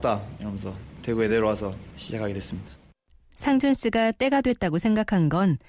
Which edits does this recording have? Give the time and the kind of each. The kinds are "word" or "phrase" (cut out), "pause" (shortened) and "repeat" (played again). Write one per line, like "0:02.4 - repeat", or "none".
none